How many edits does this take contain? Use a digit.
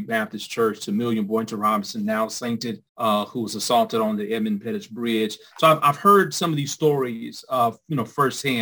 1